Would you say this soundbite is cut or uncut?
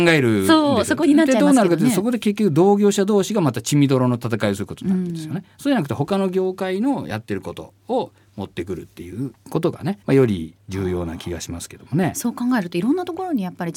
cut